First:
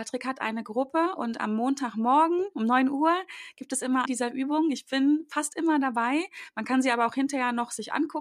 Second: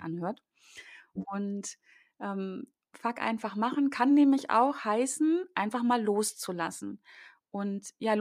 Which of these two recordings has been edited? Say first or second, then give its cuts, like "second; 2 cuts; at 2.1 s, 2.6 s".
first; 1 cut; at 4.1 s